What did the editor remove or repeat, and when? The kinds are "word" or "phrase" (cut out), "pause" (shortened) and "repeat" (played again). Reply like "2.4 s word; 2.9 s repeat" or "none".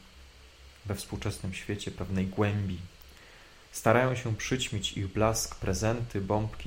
3.6 s pause